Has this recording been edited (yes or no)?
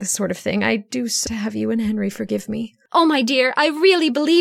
yes